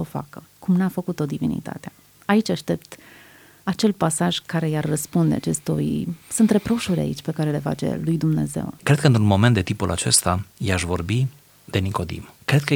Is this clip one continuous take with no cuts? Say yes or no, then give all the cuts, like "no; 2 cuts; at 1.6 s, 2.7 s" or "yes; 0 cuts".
no; 2 cuts; at 6.2 s, 8.8 s